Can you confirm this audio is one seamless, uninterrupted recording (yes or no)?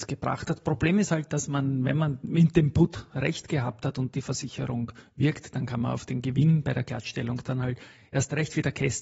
yes